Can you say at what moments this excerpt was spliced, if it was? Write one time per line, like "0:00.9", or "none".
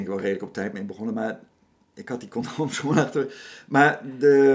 none